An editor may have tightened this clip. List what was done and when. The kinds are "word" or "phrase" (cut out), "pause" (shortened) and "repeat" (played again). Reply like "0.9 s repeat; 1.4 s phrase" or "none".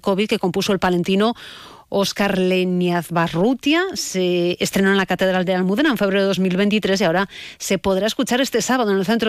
none